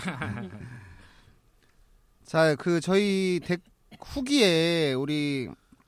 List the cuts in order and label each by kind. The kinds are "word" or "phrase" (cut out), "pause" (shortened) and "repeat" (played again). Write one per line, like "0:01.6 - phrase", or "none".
none